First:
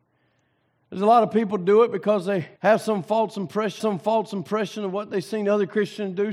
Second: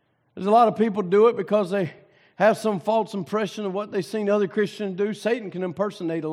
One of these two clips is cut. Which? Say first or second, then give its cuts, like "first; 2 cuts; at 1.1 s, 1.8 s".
first; 2 cuts; at 2.6 s, 3.8 s